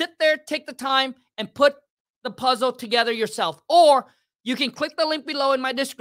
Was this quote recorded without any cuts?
yes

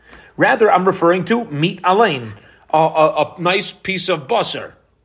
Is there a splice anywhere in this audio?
no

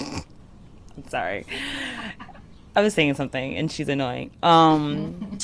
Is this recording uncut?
yes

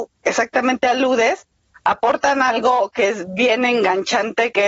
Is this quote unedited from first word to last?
yes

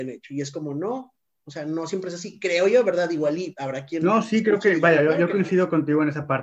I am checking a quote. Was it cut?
no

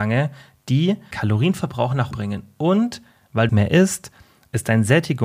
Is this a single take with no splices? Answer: no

